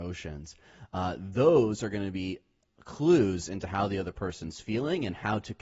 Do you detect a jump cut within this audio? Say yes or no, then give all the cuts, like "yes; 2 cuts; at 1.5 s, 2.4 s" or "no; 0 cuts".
no; 0 cuts